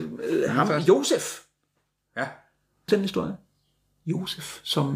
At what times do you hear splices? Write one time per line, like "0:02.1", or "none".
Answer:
0:02.9